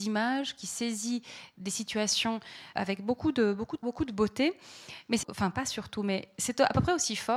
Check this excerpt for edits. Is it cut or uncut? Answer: cut